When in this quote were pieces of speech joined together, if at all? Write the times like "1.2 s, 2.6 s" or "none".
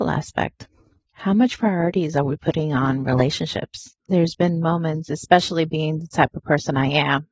1.1 s, 4.0 s